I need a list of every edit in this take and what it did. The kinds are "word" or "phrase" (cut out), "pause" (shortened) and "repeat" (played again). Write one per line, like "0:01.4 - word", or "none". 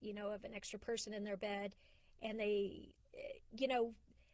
none